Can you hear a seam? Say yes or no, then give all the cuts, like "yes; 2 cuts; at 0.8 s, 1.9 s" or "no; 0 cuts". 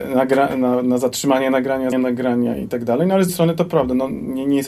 yes; 2 cuts; at 1.9 s, 3.3 s